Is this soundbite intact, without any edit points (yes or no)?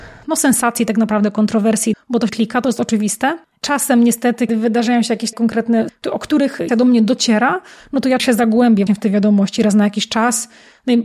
no